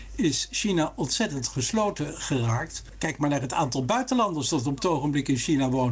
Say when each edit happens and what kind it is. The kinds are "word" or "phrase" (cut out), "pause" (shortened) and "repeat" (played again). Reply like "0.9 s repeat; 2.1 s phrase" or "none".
none

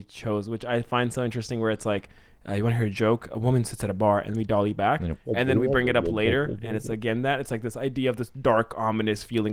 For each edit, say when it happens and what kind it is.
none

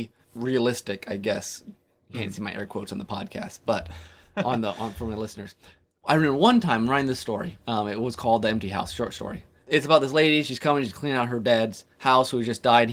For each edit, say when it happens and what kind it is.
none

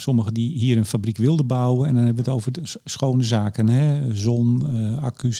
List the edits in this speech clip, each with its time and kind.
none

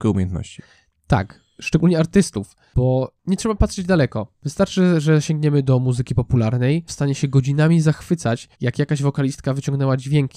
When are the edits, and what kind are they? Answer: 6.9 s phrase; 8.5 s pause

